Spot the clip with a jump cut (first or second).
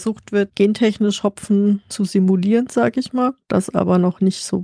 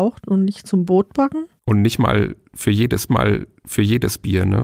second